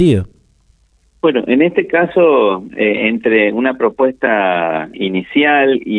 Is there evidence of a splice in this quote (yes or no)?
yes